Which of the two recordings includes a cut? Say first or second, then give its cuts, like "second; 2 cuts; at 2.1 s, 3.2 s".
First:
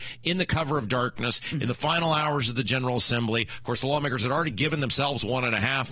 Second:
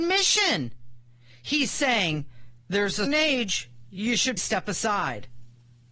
second; 2 cuts; at 3.1 s, 4.4 s